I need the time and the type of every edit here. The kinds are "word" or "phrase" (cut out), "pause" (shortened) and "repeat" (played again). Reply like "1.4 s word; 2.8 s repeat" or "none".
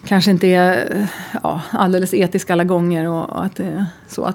none